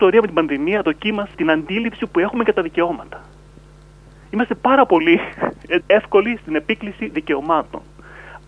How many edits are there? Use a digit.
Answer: 2